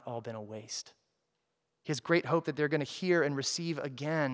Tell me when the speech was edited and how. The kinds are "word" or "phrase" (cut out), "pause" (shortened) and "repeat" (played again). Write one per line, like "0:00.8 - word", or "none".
none